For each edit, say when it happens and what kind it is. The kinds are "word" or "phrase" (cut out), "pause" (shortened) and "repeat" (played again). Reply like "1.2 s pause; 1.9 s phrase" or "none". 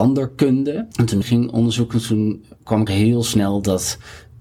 0.9 s pause; 1.2 s phrase; 2.9 s word